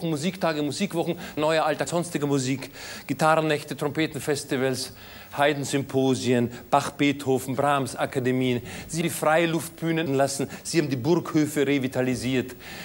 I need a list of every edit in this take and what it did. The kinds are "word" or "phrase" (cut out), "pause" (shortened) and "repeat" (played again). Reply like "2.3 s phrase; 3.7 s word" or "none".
1.4 s word; 1.9 s word; 9.0 s word; 10.1 s word